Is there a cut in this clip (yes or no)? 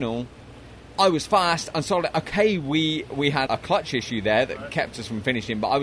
yes